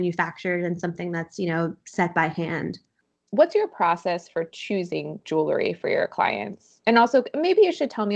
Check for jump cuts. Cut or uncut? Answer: uncut